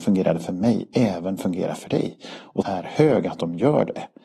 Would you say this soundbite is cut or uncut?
cut